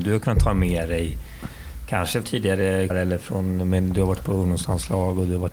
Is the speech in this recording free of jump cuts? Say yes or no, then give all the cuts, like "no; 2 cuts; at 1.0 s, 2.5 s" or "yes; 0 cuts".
no; 3 cuts; at 2.2 s, 2.9 s, 4.2 s